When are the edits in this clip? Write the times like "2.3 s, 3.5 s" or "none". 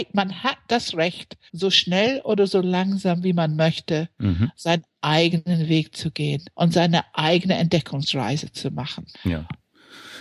1.5 s, 6.5 s, 9.1 s